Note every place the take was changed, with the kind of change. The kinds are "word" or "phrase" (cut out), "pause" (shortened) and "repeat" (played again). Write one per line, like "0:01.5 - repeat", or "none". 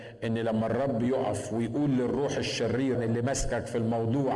0:02.9 - word